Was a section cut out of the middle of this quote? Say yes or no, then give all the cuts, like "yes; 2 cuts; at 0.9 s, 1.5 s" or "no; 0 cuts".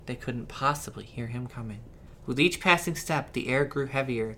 no; 0 cuts